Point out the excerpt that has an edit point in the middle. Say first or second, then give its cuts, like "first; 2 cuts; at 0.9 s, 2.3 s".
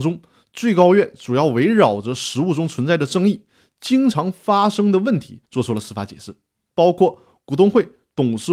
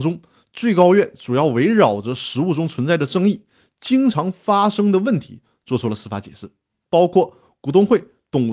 first; 1 cut; at 5.4 s